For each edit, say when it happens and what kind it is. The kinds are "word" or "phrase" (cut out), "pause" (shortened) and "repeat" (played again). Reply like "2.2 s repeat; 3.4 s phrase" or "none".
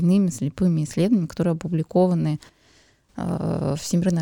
none